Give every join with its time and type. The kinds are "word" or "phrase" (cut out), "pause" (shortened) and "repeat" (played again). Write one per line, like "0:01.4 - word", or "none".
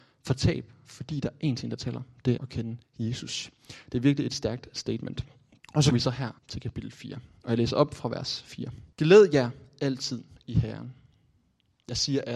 0:02.4 - word
0:02.8 - pause
0:05.6 - pause
0:05.9 - word
0:06.4 - pause
0:08.9 - pause